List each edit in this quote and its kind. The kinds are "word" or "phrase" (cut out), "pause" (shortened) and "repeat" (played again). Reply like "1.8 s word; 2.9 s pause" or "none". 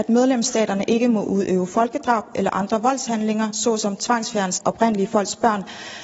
4.6 s word

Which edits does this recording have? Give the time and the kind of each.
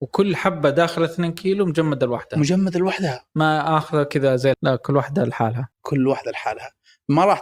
4.5 s word; 5.7 s pause

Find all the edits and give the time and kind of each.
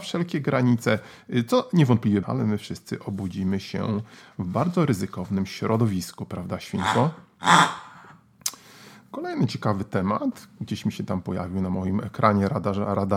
2.2 s phrase

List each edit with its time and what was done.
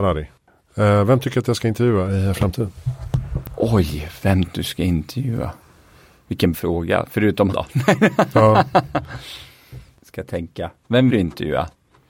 4.5 s word; 6.5 s word; 7.5 s word; 11.1 s word

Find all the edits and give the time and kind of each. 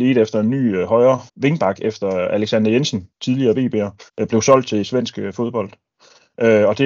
1.3 s pause; 3.1 s pause; 4.1 s pause

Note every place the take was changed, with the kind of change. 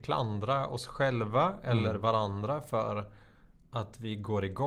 none

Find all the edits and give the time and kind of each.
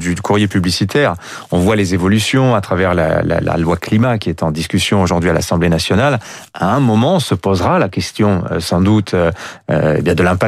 none

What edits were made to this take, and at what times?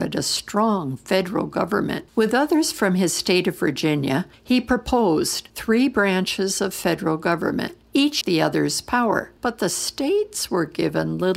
2.1 s pause; 8.2 s phrase; 9.4 s pause

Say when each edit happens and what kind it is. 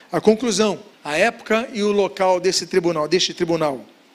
0.9 s pause

